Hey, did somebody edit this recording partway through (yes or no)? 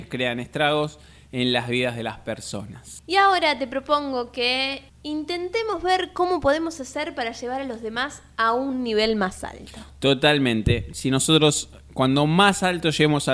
no